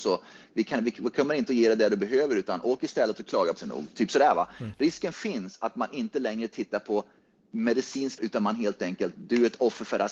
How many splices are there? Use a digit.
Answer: 2